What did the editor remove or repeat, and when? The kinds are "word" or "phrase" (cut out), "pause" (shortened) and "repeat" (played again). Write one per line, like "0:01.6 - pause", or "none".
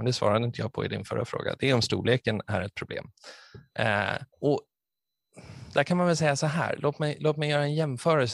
0:04.3 - pause